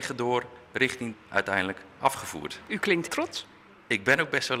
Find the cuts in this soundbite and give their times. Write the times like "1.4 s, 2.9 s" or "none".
1.1 s, 3.1 s

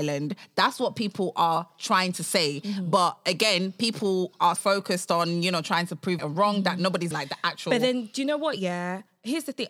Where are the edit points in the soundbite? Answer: 4.6 s, 6.2 s, 7.1 s

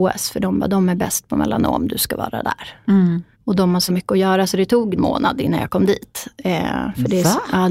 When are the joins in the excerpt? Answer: 3.3 s, 3.9 s, 5.0 s

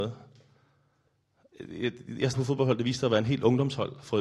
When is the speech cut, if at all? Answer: 2.3 s

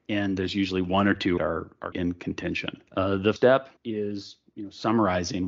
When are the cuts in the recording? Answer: 1.4 s, 1.9 s, 2.9 s, 3.4 s, 3.8 s

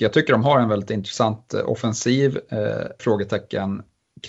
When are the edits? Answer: 3.0 s

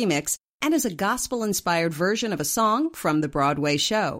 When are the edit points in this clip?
none

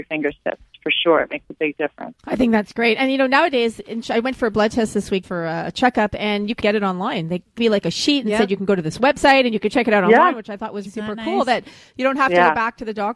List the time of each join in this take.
2.2 s, 5.2 s, 6.6 s, 7.6 s, 10.9 s

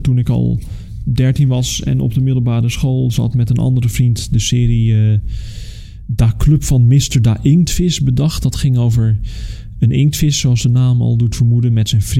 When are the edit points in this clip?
none

